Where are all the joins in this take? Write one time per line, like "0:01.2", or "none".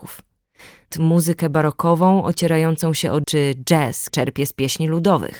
0:00.9
0:03.2
0:04.1